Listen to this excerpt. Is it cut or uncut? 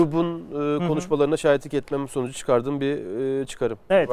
uncut